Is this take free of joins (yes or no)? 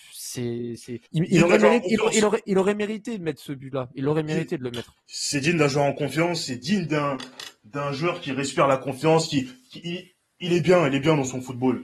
no